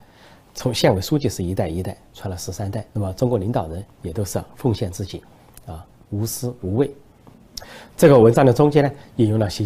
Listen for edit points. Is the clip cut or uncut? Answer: cut